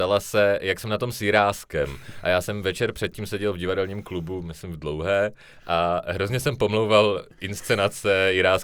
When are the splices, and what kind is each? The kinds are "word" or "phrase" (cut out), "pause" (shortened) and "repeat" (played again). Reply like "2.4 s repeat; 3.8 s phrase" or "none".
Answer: none